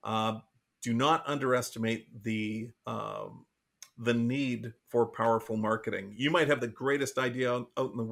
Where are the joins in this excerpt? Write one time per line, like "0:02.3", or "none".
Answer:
0:02.8
0:04.8
0:06.6